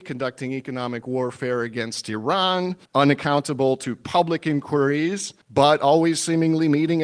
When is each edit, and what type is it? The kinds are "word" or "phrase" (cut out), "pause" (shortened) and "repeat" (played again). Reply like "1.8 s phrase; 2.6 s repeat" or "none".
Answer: 2.8 s pause; 5.4 s pause